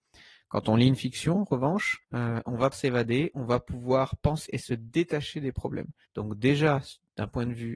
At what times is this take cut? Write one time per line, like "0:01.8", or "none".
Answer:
0:02.0
0:02.7
0:04.5
0:06.1